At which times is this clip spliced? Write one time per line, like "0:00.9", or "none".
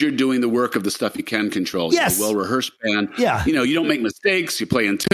none